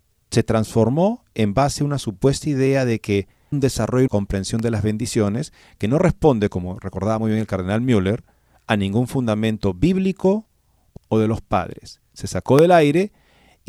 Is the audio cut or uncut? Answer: cut